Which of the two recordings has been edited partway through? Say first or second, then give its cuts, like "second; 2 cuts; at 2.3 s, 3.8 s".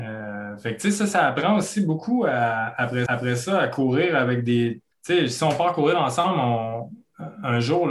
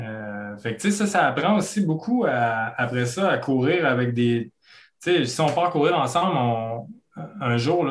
first; 2 cuts; at 3.1 s, 4.9 s